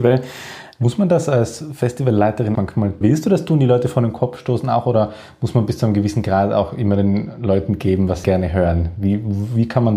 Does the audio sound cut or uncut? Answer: cut